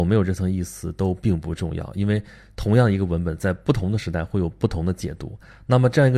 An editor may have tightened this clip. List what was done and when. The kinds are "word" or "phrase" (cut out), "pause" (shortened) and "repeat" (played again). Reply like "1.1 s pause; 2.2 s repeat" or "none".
none